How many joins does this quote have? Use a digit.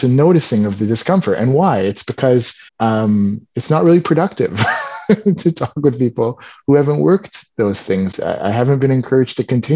2